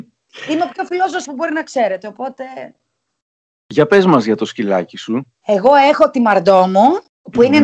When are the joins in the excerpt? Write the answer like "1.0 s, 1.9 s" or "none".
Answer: 1.2 s